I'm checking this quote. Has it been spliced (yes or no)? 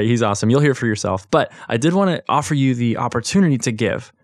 no